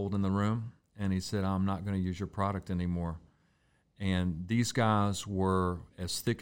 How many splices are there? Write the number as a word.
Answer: zero